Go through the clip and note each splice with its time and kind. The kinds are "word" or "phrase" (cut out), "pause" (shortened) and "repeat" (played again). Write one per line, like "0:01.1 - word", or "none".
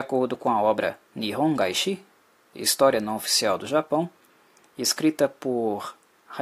none

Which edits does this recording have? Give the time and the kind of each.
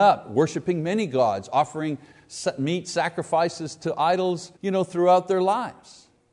0:04.6 - pause

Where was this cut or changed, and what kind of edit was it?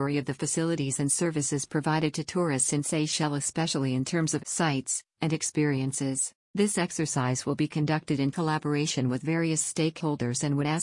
0:04.4 - word
0:06.4 - pause

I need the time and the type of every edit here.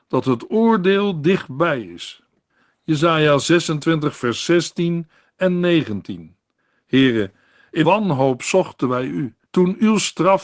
0:07.8 - word
0:09.4 - pause

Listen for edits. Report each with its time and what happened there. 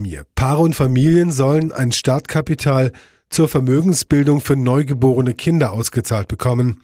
none

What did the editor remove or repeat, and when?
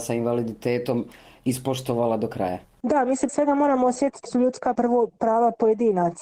0:03.3 - word
0:04.3 - word
0:04.8 - word

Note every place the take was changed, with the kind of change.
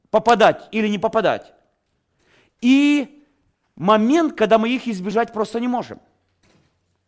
none

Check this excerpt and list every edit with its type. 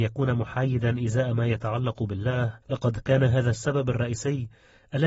0:02.6 - pause

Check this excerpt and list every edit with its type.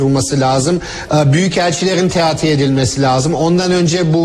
none

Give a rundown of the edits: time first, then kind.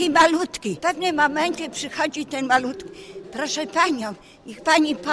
none

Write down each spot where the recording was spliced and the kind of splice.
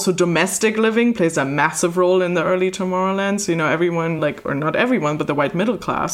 none

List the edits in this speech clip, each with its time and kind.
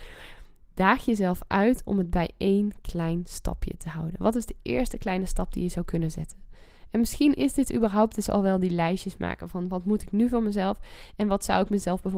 none

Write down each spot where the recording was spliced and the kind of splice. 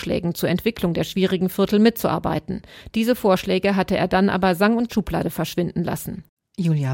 0:04.9 - phrase

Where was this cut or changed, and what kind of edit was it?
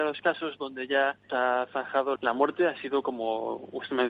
0:01.3 - word
0:02.2 - phrase

